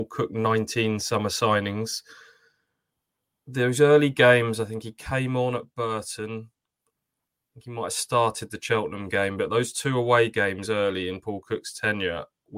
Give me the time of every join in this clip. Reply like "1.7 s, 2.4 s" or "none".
none